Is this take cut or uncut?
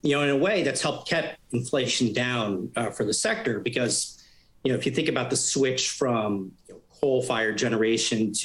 uncut